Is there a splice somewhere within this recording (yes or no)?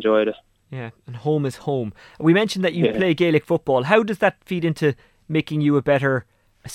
no